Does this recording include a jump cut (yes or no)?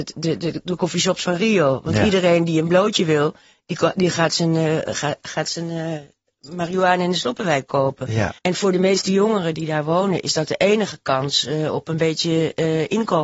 yes